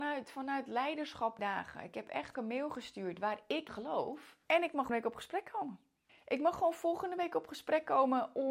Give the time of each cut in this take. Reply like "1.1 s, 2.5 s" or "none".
1.4 s, 2.3 s, 3.7 s, 4.4 s, 4.9 s, 6.1 s